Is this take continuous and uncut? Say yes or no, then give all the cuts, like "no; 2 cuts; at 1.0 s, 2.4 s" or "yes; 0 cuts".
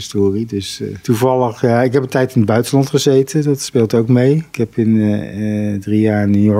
yes; 0 cuts